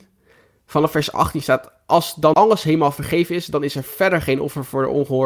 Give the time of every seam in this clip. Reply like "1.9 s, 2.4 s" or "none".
2.3 s

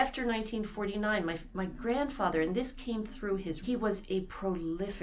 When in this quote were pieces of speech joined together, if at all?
3.6 s

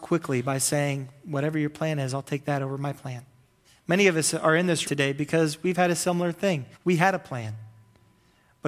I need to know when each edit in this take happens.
3.6 s, 4.8 s, 6.7 s

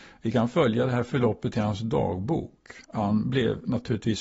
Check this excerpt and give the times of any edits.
2.8 s

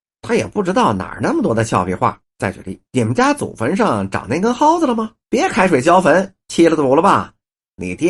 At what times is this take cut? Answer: 2.2 s, 2.9 s, 5.2 s

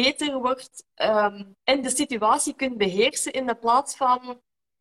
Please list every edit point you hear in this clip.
1.6 s

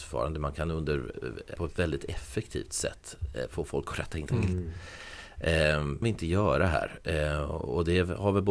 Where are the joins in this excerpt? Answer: 1.6 s, 4.3 s, 6.0 s

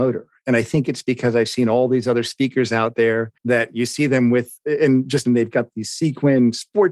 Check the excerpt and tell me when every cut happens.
3.4 s, 5.3 s

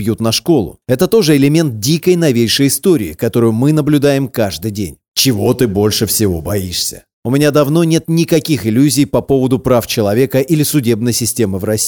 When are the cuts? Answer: 7.1 s

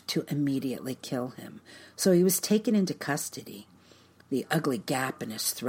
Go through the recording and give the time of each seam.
none

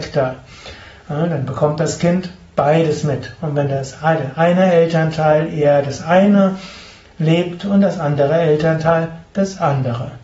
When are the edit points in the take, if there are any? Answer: none

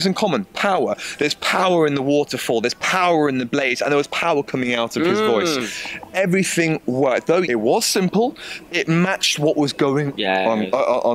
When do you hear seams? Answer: 7.4 s, 8.6 s, 10.2 s

